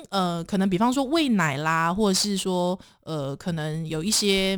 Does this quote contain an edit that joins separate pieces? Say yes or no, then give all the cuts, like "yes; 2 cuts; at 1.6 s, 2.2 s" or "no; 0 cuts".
no; 0 cuts